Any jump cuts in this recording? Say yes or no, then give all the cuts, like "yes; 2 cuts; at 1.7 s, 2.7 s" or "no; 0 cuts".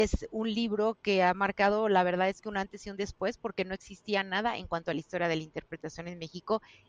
no; 0 cuts